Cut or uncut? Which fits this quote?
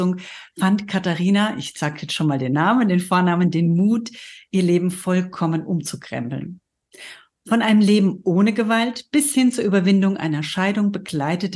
uncut